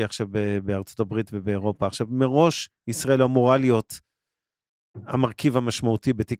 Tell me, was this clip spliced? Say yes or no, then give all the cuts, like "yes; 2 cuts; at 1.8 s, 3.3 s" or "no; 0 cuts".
no; 0 cuts